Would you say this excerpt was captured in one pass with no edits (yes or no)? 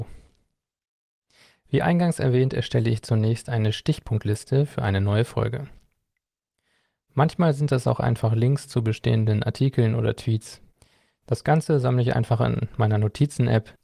yes